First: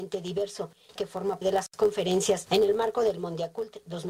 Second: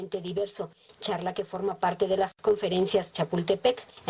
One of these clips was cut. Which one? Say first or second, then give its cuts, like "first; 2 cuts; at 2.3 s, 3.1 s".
first; 3 cuts; at 1.0 s, 1.4 s, 2.5 s